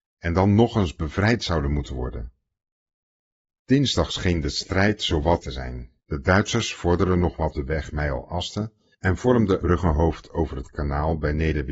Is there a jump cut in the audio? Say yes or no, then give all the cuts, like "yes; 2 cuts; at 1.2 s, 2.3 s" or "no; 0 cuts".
yes; 4 cuts; at 5.4 s, 6.0 s, 7.5 s, 9.6 s